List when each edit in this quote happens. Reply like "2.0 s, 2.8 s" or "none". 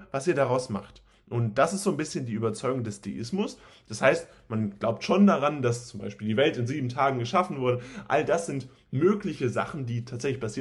none